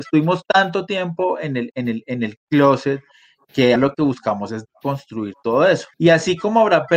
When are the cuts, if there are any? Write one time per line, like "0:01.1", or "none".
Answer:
0:03.8
0:05.9